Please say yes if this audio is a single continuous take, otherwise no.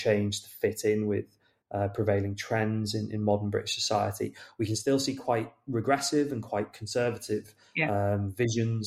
yes